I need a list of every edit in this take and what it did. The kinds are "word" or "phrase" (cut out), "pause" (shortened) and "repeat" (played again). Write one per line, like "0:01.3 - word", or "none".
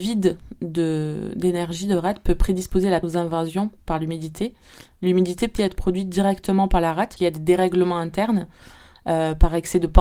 0:03.0 - word
0:05.6 - word
0:07.2 - word